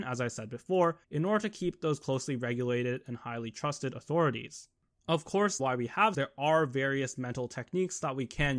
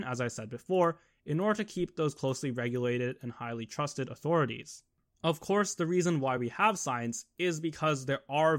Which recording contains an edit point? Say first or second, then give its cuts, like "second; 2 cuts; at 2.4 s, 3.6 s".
first; 3 cuts; at 1.0 s, 5.6 s, 6.1 s